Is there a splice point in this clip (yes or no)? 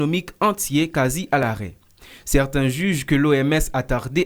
no